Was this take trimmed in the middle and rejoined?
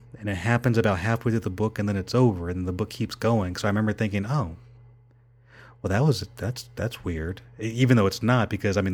no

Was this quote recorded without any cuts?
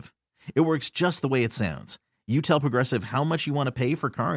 yes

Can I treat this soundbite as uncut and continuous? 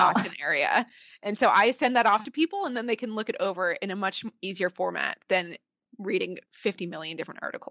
no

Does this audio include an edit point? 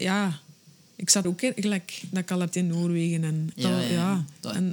yes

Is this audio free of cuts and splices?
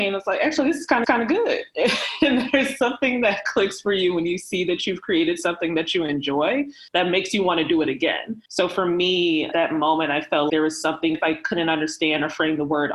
no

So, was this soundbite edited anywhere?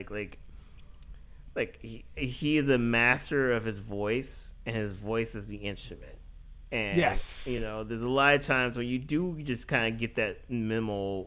no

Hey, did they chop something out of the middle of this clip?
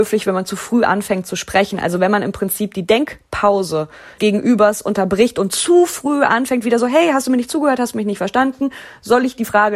yes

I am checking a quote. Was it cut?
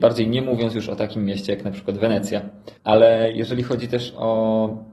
yes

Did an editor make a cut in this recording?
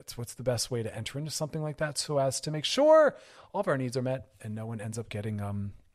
no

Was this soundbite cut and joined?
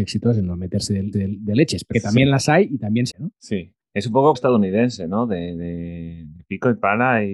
yes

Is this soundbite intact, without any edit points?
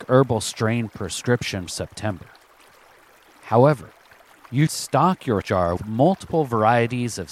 no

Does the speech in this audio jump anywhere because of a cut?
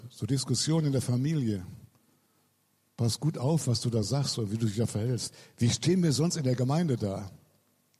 no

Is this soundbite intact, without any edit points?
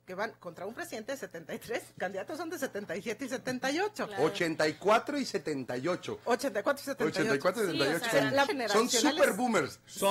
no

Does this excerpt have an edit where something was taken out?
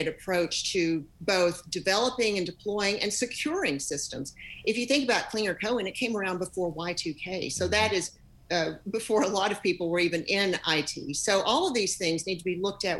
no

